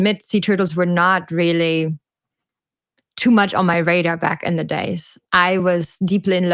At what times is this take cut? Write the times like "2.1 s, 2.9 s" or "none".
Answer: none